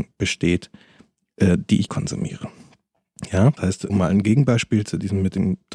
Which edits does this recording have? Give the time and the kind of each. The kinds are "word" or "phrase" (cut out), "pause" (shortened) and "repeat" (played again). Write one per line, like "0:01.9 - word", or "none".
0:01.9 - word
0:03.6 - word
0:03.9 - word

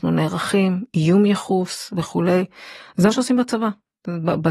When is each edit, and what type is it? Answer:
0:03.1 - phrase

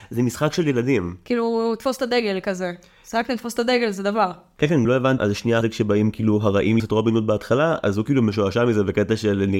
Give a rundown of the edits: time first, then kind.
0:04.8 - phrase
0:05.2 - phrase
0:05.6 - word
0:06.8 - word

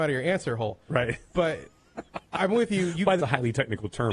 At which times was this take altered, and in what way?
0:03.2 - phrase

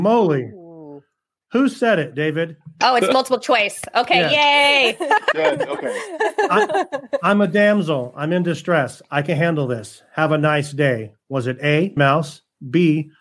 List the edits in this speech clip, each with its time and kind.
0:12.0 - word

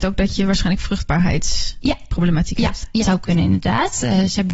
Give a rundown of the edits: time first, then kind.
0:03.0 - phrase

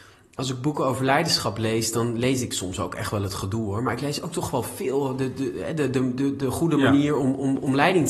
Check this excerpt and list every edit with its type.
none

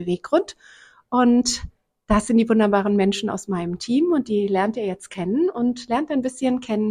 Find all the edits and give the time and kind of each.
none

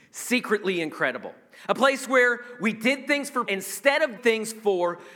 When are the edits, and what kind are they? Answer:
0:03.5 - word
0:04.2 - word

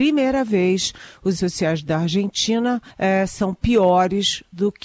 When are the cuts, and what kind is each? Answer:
0:01.4 - word
0:02.9 - pause

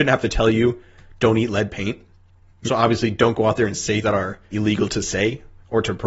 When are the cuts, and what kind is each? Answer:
0:02.7 - word
0:04.0 - word
0:04.5 - word

